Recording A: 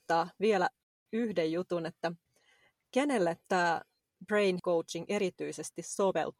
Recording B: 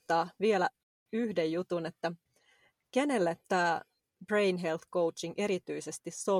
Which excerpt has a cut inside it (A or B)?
A